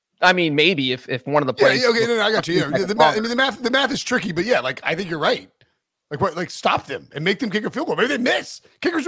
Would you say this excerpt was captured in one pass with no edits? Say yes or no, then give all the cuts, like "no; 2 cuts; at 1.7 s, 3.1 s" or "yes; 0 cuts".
yes; 0 cuts